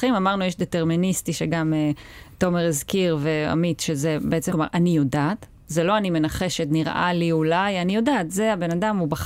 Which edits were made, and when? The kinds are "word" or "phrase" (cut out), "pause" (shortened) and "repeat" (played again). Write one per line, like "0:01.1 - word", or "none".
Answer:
0:04.5 - word